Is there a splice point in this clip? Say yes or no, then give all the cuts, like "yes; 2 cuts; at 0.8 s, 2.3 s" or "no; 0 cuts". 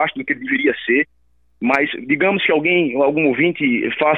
no; 0 cuts